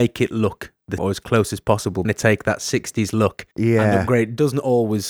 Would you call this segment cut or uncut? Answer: cut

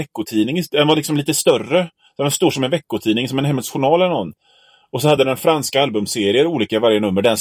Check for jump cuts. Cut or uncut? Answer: uncut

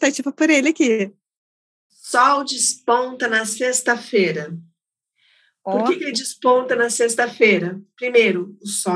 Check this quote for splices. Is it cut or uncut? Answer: uncut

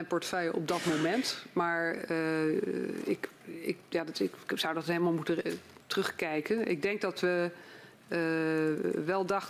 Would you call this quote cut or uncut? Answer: uncut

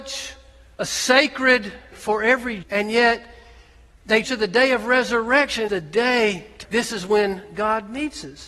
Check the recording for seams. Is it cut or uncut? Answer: cut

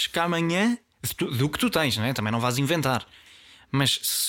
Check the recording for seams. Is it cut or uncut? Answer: uncut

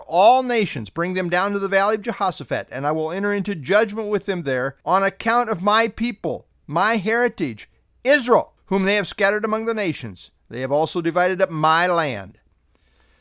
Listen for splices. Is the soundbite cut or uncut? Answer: cut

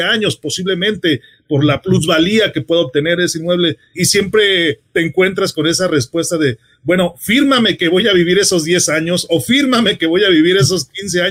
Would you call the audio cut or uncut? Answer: uncut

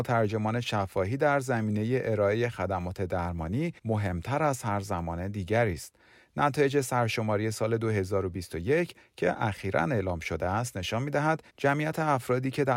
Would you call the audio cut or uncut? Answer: cut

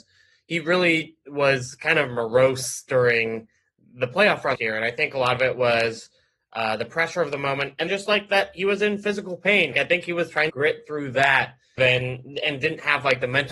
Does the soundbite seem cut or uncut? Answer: cut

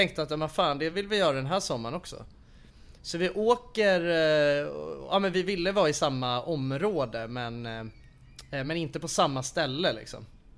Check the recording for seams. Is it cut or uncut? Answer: uncut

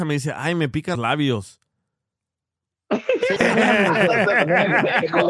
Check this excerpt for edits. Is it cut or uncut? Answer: cut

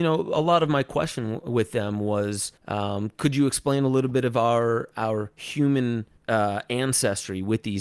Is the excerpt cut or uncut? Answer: cut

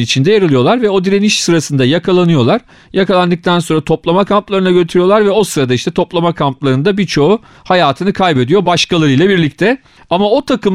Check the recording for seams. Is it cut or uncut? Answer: uncut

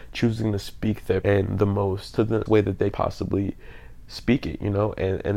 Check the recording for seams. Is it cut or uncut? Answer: cut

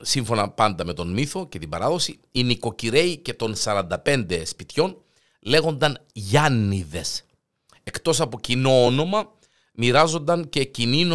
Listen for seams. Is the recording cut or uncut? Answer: uncut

